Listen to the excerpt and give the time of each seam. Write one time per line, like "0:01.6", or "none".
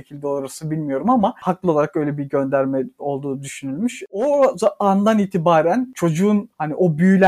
none